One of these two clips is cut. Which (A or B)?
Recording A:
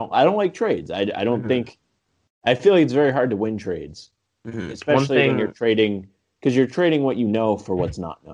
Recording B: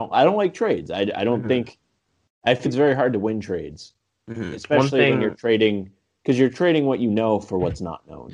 B